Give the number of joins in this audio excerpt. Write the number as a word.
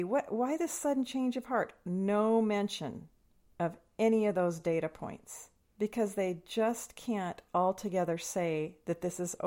zero